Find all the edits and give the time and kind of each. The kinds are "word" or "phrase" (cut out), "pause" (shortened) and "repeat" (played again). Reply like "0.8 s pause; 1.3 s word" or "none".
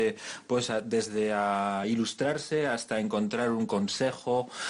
none

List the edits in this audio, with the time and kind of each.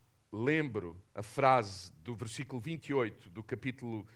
1.1 s pause

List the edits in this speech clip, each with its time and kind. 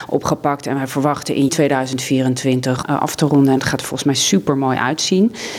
1.5 s word; 2.8 s phrase

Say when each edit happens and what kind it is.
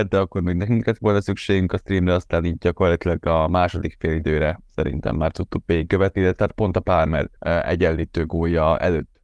7.4 s pause

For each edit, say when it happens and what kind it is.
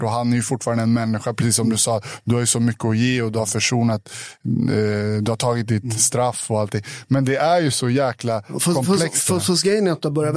none

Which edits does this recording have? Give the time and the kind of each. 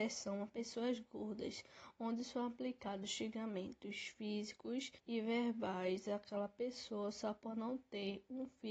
5.0 s pause

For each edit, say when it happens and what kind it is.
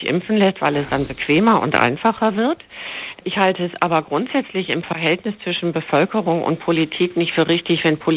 none

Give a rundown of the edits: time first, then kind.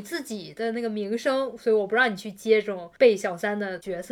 3.0 s pause

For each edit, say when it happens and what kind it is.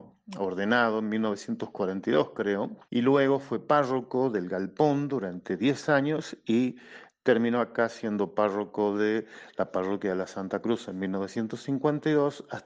2.8 s pause

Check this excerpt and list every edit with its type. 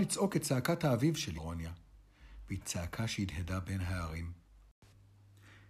1.4 s word; 2.6 s word

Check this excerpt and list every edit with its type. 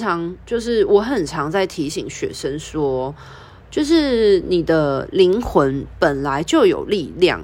none

